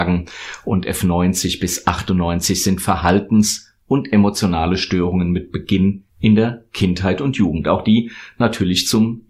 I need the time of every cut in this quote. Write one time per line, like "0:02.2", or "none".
0:06.1